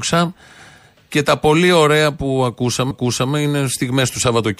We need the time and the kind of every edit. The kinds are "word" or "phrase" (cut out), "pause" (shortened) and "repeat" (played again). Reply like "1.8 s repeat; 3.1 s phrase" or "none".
2.9 s repeat